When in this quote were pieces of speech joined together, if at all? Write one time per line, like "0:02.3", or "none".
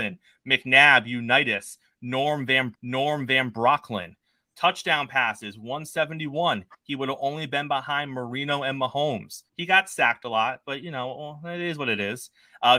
0:02.7
0:09.5